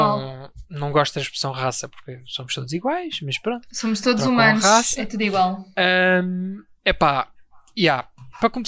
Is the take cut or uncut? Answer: uncut